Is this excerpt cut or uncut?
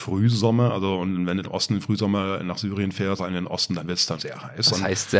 cut